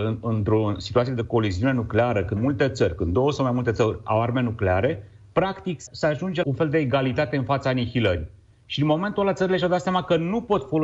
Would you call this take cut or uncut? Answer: cut